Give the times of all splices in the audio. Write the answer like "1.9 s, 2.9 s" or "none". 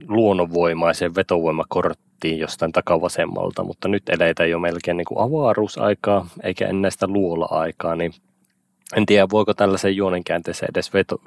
none